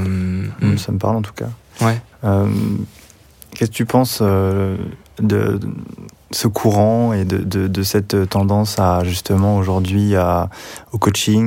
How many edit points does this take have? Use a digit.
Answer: 0